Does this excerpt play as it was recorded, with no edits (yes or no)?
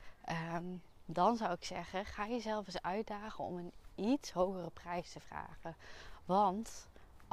yes